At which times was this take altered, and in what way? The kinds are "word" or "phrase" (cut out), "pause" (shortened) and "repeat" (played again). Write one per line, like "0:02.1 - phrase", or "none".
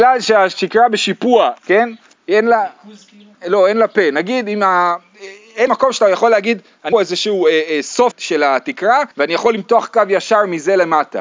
0:01.6 - phrase
0:03.3 - pause
0:05.7 - phrase
0:06.9 - phrase
0:08.1 - word
0:09.1 - pause